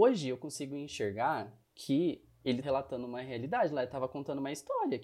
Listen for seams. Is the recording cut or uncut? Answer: cut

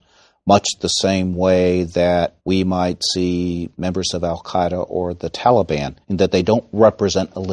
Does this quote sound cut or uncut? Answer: cut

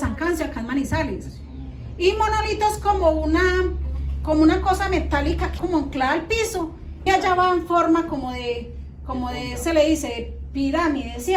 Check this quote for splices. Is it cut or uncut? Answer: cut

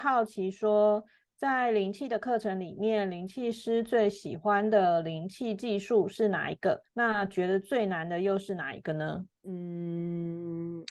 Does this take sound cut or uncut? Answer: cut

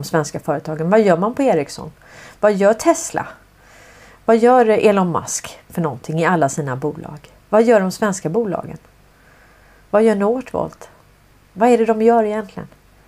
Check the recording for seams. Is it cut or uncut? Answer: uncut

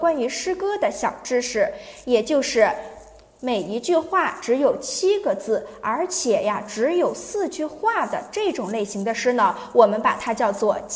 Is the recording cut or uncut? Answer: uncut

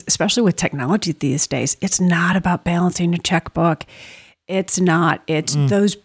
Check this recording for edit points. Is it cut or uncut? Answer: uncut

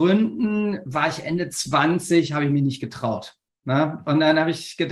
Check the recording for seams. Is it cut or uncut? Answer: uncut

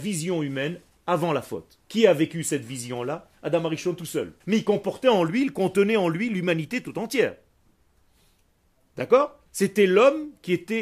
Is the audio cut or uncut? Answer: cut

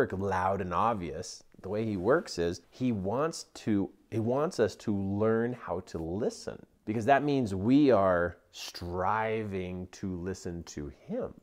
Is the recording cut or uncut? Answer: cut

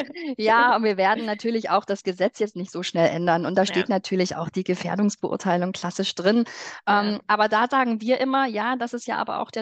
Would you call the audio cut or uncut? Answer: uncut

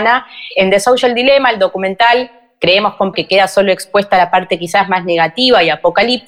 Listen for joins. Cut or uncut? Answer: cut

